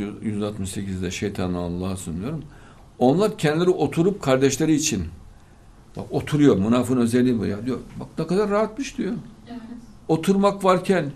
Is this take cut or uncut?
uncut